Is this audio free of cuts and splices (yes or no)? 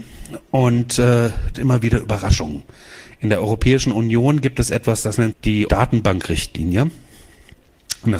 no